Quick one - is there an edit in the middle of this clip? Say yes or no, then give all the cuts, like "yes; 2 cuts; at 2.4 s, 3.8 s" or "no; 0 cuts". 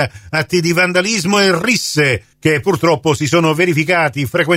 yes; 1 cut; at 2.3 s